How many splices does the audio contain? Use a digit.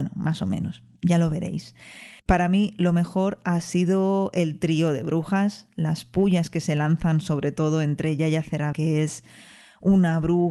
2